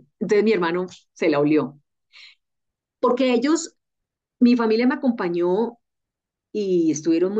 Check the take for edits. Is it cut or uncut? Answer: uncut